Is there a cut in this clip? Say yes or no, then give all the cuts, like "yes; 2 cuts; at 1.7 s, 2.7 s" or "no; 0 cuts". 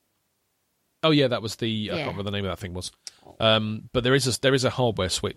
no; 0 cuts